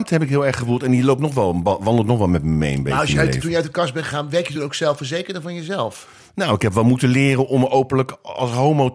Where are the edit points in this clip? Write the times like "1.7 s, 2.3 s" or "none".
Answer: none